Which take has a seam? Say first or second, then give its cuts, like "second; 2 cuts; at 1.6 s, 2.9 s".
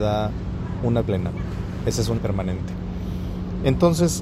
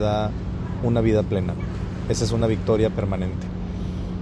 first; 2 cuts; at 1.0 s, 2.2 s